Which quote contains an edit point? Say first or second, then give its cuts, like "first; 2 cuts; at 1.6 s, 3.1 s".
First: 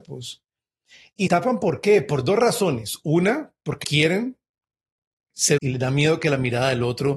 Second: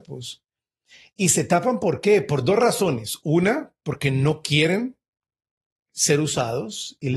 first; 3 cuts; at 1.3 s, 3.8 s, 5.6 s